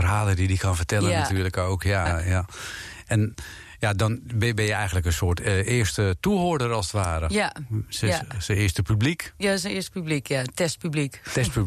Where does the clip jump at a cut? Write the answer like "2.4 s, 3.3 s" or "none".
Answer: 2.1 s